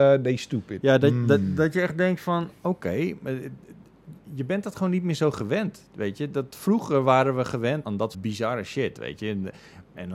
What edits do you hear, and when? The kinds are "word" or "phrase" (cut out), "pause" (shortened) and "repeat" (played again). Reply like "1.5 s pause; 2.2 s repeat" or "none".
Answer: 7.8 s word; 8.1 s word